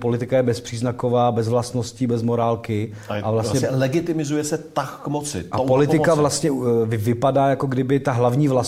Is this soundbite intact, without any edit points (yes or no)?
yes